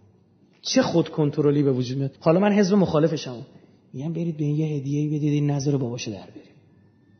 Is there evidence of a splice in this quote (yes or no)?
yes